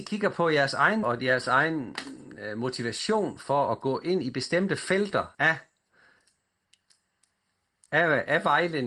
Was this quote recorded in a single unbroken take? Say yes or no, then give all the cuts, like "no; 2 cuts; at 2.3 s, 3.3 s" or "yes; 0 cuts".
no; 2 cuts; at 1.0 s, 5.3 s